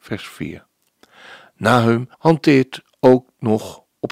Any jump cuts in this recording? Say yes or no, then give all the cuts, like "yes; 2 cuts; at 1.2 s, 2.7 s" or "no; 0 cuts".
yes; 1 cut; at 2.1 s